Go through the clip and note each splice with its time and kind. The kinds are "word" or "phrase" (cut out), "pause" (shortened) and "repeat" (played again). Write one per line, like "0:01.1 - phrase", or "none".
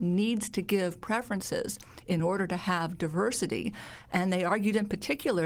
none